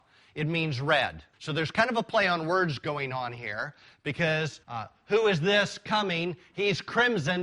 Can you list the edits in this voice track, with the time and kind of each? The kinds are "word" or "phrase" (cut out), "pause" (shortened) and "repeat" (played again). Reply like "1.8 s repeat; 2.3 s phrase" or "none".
1.3 s pause; 4.6 s pause